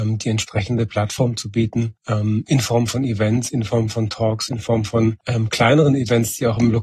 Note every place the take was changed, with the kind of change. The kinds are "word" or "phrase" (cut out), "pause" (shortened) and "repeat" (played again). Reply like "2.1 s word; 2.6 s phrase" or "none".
2.0 s pause